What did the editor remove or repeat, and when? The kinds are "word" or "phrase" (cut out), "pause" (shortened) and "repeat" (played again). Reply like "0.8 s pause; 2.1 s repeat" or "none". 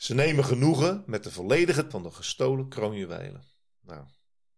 1.9 s word

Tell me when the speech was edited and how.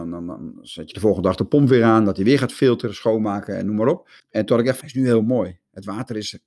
4.2 s pause; 4.8 s phrase

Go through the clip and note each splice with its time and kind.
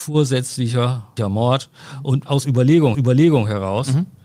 2.3 s word; 2.9 s repeat

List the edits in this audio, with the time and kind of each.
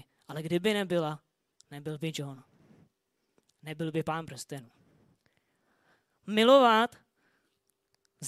none

